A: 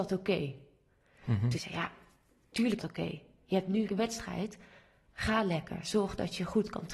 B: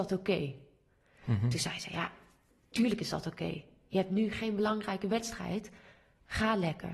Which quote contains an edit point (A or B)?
A